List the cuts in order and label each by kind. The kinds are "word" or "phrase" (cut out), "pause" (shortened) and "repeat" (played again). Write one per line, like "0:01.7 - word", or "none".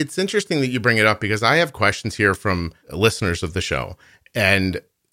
0:02.8 - pause